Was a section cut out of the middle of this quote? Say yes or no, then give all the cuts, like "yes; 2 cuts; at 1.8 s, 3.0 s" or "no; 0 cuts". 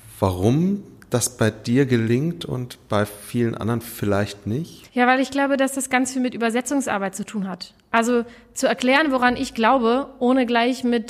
yes; 1 cut; at 4.9 s